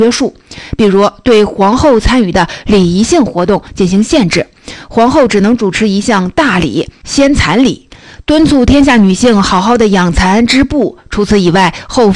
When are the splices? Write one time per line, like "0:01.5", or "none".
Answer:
none

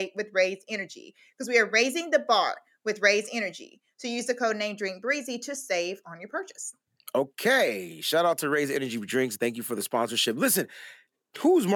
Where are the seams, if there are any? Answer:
none

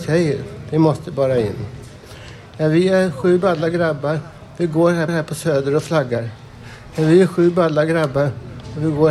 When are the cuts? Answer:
0:05.1

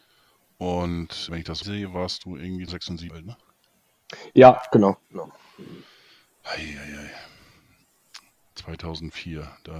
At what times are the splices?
0:01.3
0:01.6
0:02.7
0:03.1

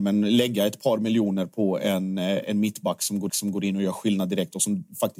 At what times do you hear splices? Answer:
0:03.3

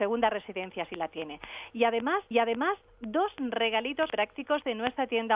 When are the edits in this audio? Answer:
0:02.3
0:04.1

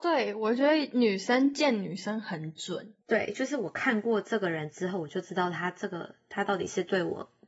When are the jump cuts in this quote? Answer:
0:03.0

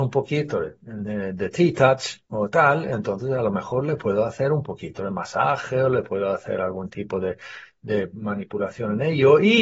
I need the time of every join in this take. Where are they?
0:02.3

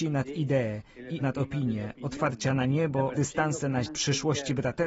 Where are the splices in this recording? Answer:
0:01.2
0:03.1
0:03.9

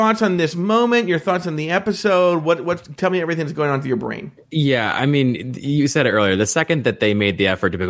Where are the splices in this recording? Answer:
0:04.4

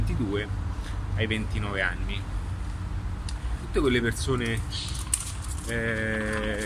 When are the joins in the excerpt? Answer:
0:03.6

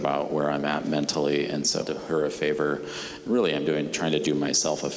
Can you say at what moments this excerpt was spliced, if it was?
0:01.8

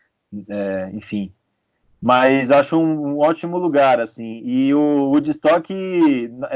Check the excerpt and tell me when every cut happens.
none

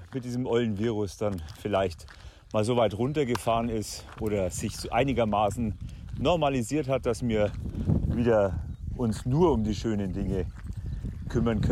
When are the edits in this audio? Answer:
none

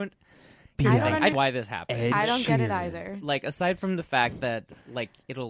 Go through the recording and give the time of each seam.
0:01.3

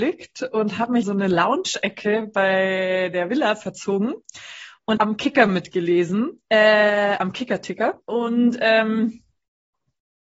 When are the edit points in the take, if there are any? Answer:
0:01.0
0:05.0
0:06.4
0:08.0

